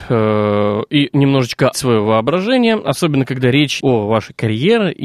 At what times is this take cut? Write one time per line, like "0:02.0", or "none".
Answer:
0:01.7
0:03.8

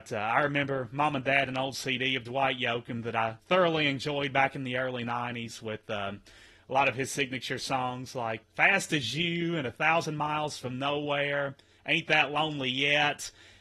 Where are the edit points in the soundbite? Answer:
0:01.5
0:03.4
0:08.4

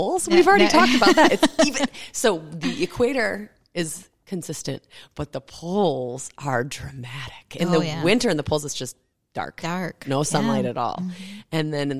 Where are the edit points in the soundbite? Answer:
none

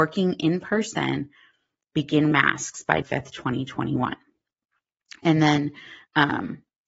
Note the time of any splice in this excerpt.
0:02.3
0:03.0

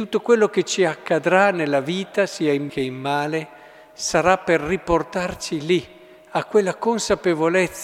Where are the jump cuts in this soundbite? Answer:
0:02.7

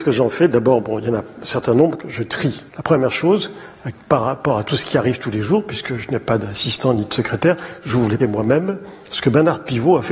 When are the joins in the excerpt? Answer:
0:02.7
0:04.0
0:08.2

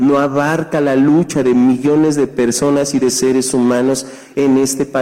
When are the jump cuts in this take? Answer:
none

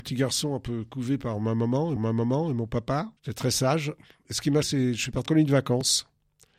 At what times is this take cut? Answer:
0:02.0
0:03.2
0:04.6
0:05.3

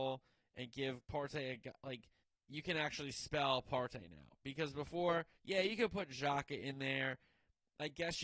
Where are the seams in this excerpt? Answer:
0:01.0
0:02.2
0:05.3

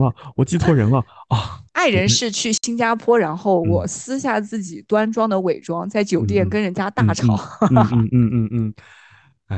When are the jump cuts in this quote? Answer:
0:01.7

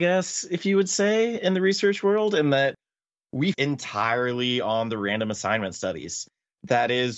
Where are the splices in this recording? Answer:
0:03.5

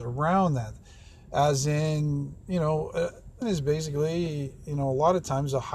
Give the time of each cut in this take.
0:03.4

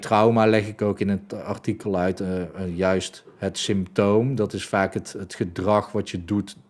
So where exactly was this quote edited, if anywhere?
none

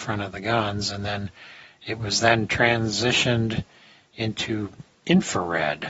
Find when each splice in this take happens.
none

